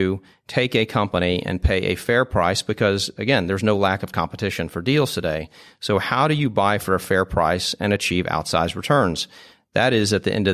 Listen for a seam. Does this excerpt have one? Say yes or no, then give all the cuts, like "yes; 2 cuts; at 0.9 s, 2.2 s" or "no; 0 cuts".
no; 0 cuts